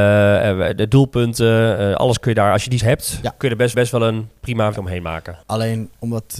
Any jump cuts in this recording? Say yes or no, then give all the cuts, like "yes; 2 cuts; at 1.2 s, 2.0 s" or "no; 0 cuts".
yes; 4 cuts; at 2.8 s, 3.7 s, 4.7 s, 5.4 s